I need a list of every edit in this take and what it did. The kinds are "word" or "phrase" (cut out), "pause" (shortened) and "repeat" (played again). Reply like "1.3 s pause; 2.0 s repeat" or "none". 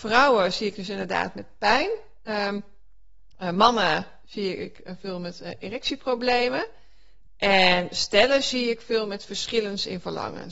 none